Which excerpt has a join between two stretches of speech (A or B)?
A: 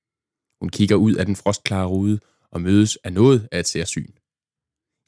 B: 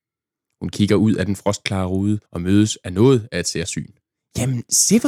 B